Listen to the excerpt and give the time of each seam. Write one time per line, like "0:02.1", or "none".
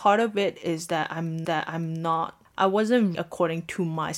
0:01.4
0:03.1